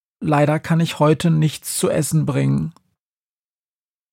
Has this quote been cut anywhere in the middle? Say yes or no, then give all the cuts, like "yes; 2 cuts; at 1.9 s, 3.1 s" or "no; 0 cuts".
no; 0 cuts